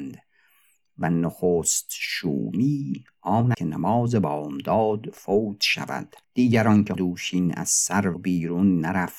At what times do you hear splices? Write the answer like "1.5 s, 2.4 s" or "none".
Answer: 3.5 s, 6.2 s, 7.0 s, 8.1 s